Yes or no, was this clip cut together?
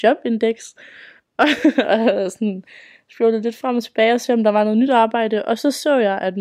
no